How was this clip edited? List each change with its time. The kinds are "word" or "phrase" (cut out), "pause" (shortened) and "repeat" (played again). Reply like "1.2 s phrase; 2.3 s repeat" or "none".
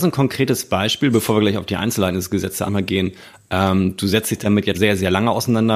2.7 s word; 4.7 s word